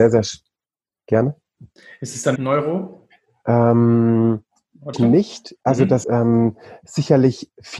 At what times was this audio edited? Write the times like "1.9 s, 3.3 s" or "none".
2.4 s, 4.9 s, 6.0 s